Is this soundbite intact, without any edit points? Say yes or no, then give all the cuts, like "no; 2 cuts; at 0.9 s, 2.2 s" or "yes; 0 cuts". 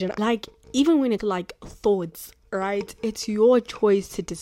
no; 1 cut; at 1.2 s